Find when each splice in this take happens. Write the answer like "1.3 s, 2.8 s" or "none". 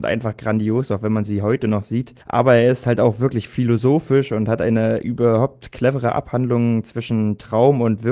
2.2 s